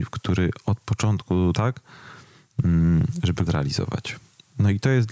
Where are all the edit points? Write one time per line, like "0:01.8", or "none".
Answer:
0:01.5
0:03.5